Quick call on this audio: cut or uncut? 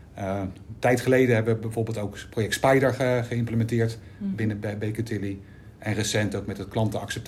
uncut